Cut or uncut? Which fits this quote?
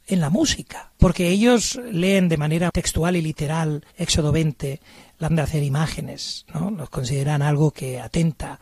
cut